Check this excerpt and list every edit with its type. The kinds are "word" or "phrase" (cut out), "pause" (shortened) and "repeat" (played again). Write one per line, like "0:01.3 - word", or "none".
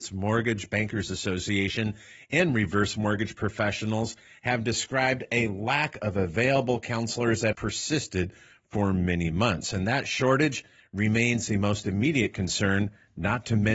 0:07.5 - word